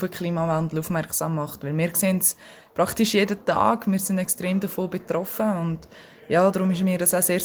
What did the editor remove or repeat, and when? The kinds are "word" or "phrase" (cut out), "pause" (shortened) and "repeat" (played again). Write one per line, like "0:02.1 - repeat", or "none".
none